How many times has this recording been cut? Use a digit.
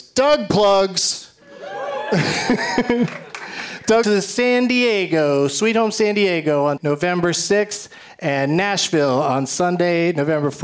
3